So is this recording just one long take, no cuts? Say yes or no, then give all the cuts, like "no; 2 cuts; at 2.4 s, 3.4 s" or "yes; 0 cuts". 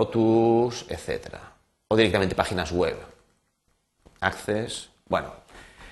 yes; 0 cuts